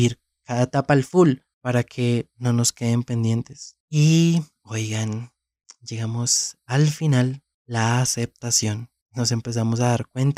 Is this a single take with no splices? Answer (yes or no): yes